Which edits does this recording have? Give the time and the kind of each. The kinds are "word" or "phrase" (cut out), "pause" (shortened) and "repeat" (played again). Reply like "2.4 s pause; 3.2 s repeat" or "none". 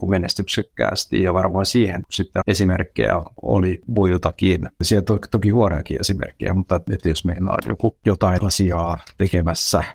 2.4 s word